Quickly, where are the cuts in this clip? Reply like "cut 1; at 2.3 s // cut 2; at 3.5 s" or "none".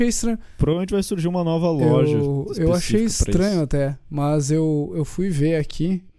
none